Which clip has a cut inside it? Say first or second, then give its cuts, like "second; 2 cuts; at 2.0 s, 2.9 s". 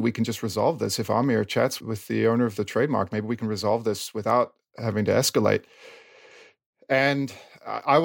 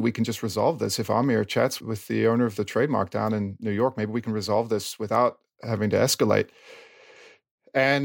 first; 1 cut; at 3.1 s